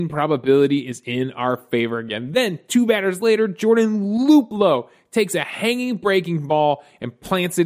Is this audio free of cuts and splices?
yes; 0 cuts

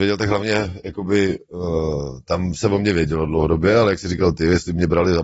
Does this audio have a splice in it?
no; 0 cuts

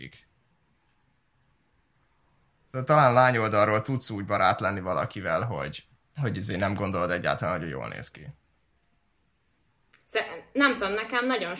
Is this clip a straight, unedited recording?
no; 1 cut; at 6.0 s

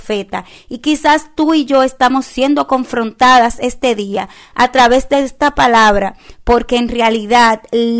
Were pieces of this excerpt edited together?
no; 0 cuts

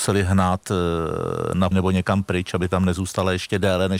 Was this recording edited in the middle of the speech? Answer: yes; 1 cut; at 1.7 s

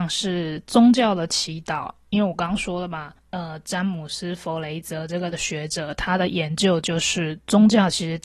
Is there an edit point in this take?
yes; 1 cut; at 3.2 s

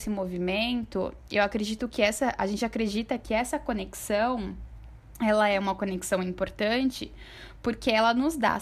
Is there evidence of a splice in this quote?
no; 0 cuts

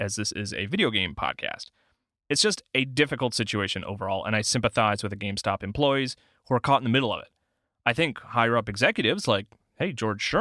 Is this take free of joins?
yes; 0 cuts

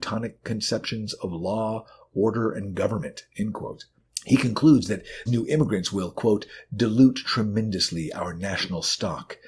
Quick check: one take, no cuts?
no; 1 cut; at 5.3 s

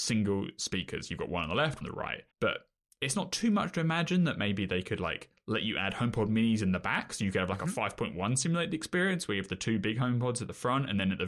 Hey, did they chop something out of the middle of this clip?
yes; 2 cuts; at 1.8 s, 2.3 s

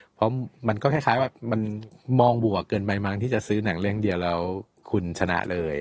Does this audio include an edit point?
no; 0 cuts

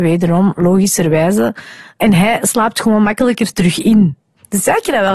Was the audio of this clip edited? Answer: no; 0 cuts

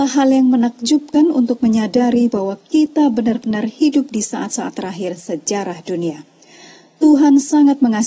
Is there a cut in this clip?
no; 0 cuts

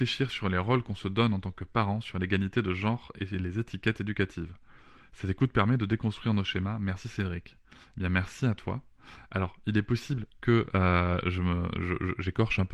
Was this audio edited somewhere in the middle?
no; 0 cuts

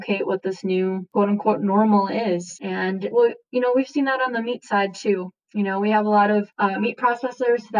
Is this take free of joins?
no; 1 cut; at 3.1 s

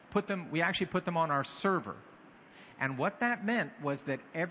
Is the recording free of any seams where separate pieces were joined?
yes; 0 cuts

